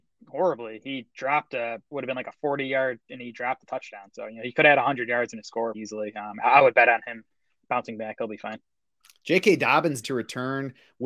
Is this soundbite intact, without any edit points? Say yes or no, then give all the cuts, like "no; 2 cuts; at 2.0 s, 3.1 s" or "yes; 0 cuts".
no; 4 cuts; at 1.9 s, 3.1 s, 5.7 s, 10.0 s